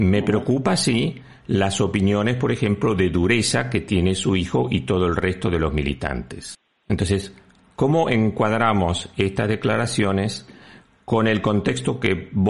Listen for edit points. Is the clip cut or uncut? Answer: uncut